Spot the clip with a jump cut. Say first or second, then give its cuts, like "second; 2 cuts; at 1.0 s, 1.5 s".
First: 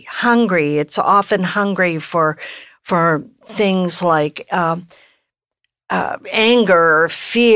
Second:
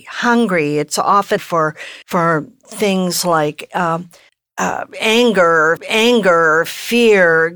second; 4 cuts; at 1.4 s, 2.0 s, 4.3 s, 5.8 s